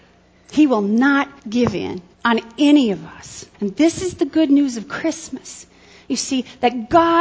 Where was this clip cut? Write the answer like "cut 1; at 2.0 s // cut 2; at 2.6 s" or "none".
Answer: cut 1; at 1.4 s // cut 2; at 2.1 s // cut 3; at 3.5 s